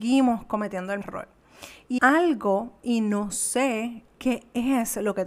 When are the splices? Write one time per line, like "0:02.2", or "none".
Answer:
0:01.0
0:02.0